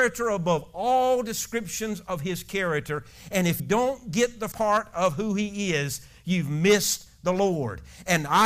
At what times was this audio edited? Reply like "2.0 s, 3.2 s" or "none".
3.6 s, 4.5 s